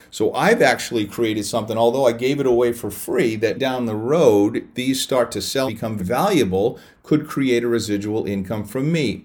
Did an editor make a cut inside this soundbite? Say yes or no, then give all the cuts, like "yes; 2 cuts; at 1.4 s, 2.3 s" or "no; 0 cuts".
yes; 4 cuts; at 3.5 s, 4.7 s, 5.7 s, 6.0 s